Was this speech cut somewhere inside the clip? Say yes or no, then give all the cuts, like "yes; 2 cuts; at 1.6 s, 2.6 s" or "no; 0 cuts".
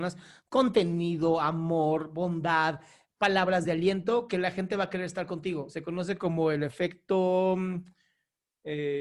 no; 0 cuts